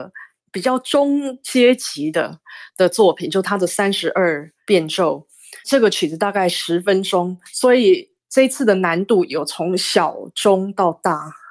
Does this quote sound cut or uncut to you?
cut